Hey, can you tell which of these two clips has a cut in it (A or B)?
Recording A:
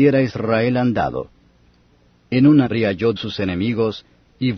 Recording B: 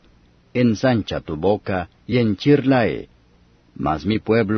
A